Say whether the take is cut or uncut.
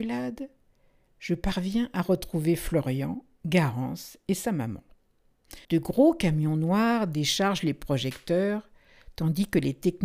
cut